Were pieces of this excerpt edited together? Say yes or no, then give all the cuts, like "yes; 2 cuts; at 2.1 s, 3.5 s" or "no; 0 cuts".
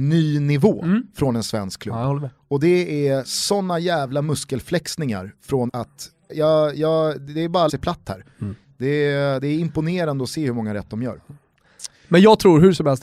yes; 3 cuts; at 5.7 s, 6.3 s, 7.7 s